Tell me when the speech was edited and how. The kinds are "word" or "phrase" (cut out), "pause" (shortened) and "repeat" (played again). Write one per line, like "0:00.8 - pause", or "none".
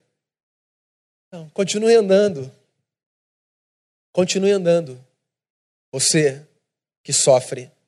none